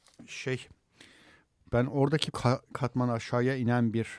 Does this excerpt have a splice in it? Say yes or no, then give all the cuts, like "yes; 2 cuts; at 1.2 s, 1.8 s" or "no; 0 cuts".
yes; 2 cuts; at 2.3 s, 2.7 s